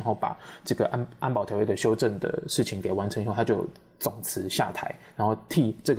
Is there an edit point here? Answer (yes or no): no